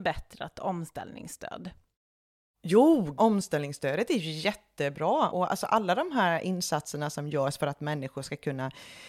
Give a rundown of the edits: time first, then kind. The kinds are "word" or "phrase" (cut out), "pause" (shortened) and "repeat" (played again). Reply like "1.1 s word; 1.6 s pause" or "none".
5.3 s word